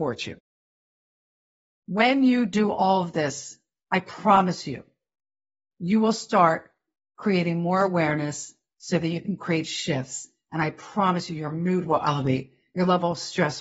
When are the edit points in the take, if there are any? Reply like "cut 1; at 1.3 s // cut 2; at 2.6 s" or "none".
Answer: none